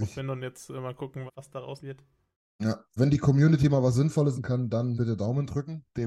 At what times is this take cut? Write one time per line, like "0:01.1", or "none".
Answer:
0:01.3
0:01.8
0:03.0
0:04.4
0:05.0